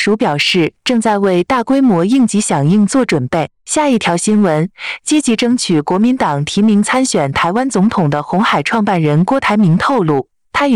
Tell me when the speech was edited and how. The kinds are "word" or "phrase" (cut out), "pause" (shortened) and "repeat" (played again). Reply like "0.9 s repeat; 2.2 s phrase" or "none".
3.6 s pause

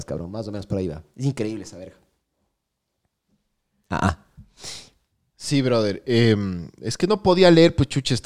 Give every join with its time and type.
none

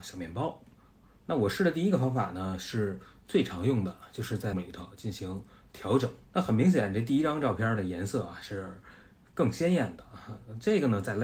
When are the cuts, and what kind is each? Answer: 4.5 s word; 6.2 s pause

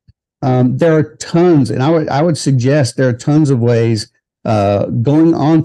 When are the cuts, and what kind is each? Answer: none

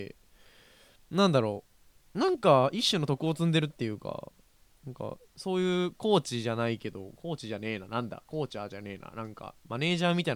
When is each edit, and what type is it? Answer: none

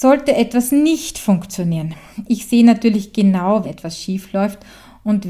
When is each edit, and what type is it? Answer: 3.6 s word

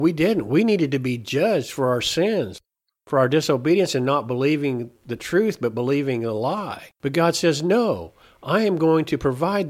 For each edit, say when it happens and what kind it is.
7.0 s pause

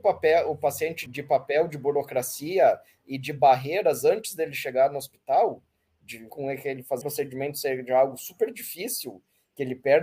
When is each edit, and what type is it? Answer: 1.1 s word; 6.3 s word; 7.0 s word

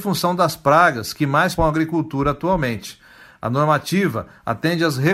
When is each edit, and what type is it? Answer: 1.6 s word

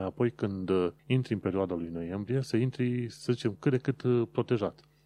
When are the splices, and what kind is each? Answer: 1.0 s pause

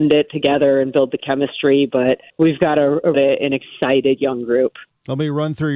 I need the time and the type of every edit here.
2.3 s pause; 3.1 s phrase

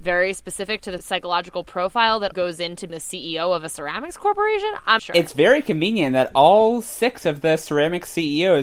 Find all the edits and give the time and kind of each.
2.3 s word; 2.9 s word; 5.0 s word

